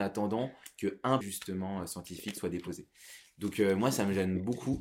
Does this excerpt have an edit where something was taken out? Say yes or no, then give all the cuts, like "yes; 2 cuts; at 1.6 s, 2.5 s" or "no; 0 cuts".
yes; 1 cut; at 1.2 s